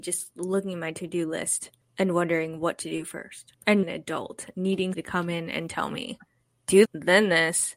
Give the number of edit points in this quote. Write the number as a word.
three